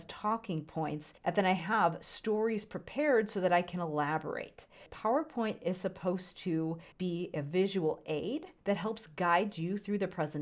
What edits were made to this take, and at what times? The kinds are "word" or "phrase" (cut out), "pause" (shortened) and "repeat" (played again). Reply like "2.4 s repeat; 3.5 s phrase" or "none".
1.2 s pause; 6.9 s pause; 8.6 s pause